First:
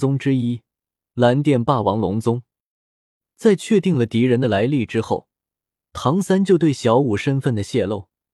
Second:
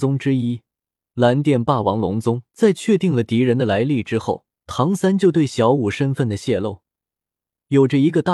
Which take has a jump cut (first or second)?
second